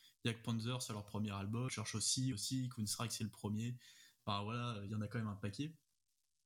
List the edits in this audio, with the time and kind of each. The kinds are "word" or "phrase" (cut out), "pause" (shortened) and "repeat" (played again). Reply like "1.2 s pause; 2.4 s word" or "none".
1.7 s word; 2.3 s word; 4.9 s word